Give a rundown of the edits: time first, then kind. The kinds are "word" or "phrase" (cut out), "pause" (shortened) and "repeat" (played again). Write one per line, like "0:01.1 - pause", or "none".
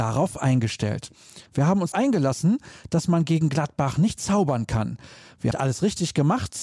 0:01.5 - pause
0:01.9 - word
0:05.5 - phrase